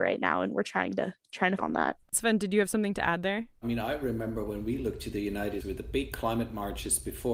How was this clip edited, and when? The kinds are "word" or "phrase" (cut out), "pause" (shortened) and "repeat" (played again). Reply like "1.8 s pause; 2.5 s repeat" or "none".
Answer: 1.6 s word; 2.1 s pause; 3.6 s pause; 5.6 s word

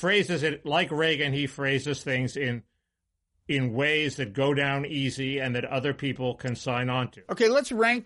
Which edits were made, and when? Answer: none

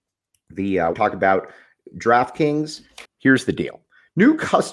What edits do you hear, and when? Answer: 0.9 s word; 3.1 s word

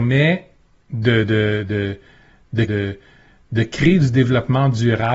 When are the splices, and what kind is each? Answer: 2.7 s repeat

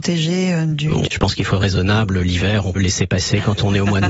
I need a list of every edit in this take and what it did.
1.1 s word; 1.5 s word; 2.8 s word

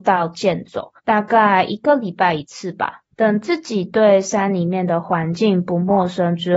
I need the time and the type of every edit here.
1.0 s pause; 3.1 s pause

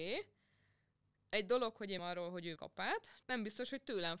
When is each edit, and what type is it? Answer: 2.0 s word; 2.6 s word; 3.2 s word

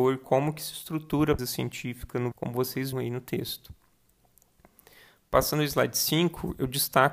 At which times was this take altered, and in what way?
1.4 s word; 2.3 s word; 2.9 s word

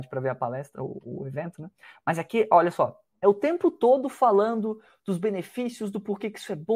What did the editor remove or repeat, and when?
3.1 s pause

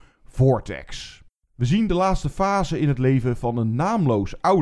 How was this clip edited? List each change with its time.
none

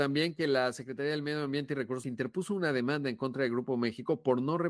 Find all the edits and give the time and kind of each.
2.0 s word

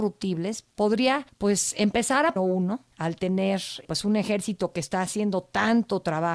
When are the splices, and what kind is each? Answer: 2.4 s phrase

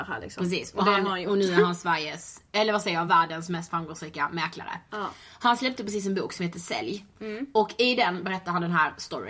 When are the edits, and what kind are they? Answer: none

